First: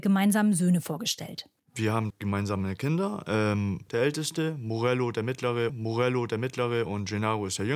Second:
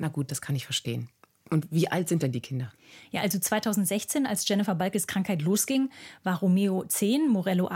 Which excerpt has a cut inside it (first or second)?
first